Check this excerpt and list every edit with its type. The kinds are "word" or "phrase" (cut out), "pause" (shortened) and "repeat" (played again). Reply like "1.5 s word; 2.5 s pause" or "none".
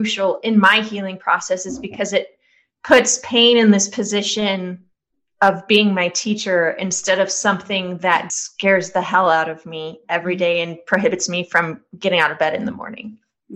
8.3 s word